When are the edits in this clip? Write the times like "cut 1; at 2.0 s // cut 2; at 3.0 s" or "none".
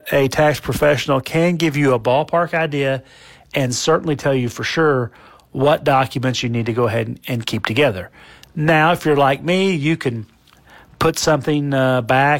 none